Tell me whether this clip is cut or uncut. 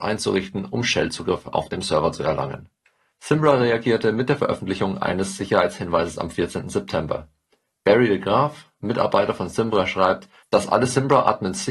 uncut